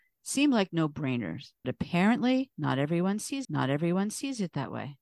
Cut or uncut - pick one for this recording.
cut